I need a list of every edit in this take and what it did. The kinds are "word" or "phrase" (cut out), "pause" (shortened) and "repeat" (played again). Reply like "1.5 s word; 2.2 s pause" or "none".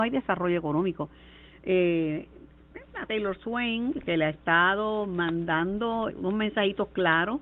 3.1 s word; 6.1 s word